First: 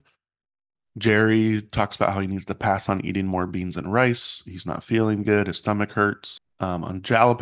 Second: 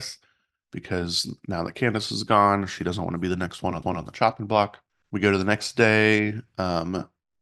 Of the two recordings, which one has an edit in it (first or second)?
second